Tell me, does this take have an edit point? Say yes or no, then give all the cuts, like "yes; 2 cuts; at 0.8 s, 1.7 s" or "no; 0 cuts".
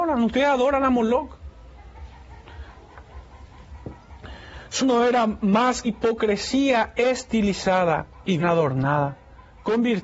yes; 3 cuts; at 4.8 s, 5.8 s, 8.4 s